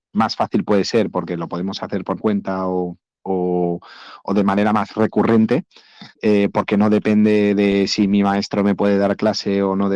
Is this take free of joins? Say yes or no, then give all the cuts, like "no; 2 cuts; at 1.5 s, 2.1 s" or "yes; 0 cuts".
no; 3 cuts; at 2.2 s, 3.2 s, 6.1 s